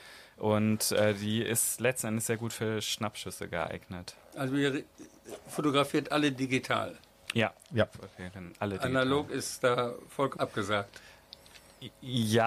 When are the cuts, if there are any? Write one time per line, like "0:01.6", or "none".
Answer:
0:10.4